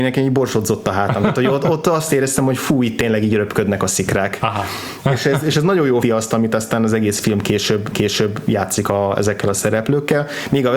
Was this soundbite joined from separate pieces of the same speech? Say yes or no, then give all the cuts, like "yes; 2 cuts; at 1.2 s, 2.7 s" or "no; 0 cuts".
yes; 2 cuts; at 6.0 s, 7.9 s